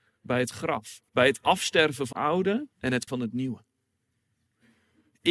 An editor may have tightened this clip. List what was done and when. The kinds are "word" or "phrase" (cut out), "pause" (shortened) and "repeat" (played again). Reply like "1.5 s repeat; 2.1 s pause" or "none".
1.1 s pause; 2.1 s word; 2.7 s pause; 3.1 s word